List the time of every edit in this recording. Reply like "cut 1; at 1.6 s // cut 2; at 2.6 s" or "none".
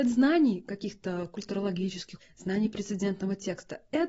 none